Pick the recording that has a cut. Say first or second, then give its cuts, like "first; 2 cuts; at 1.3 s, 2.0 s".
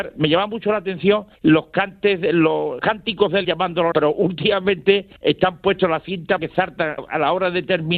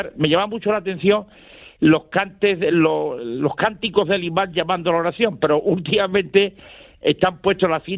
first; 7 cuts; at 1.4 s, 2.8 s, 3.4 s, 3.9 s, 5.2 s, 6.4 s, 7.0 s